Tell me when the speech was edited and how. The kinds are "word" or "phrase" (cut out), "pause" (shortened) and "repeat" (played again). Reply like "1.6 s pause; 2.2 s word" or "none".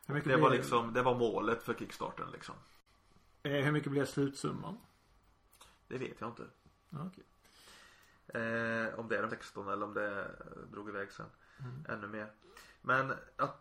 9.3 s word